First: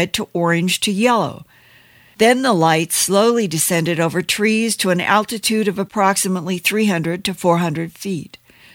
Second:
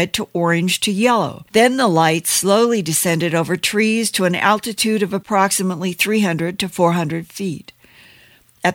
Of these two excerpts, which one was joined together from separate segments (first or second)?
second